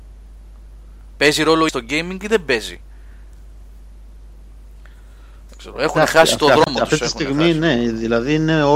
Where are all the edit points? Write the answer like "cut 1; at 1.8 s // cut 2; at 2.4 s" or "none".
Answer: cut 1; at 1.7 s